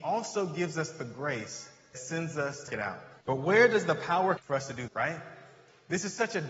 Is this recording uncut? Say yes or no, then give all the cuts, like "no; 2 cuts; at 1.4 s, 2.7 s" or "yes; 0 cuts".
no; 5 cuts; at 1.9 s, 2.7 s, 3.2 s, 4.4 s, 4.9 s